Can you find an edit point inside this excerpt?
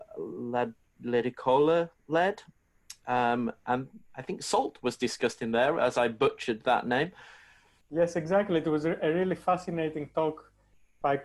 no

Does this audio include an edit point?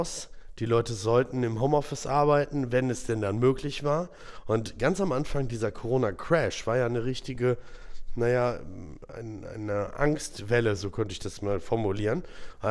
no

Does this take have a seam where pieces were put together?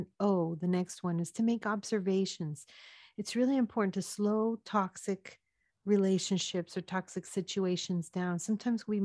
no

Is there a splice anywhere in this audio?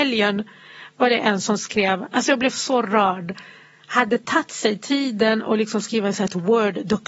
no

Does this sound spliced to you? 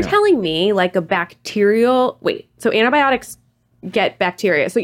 no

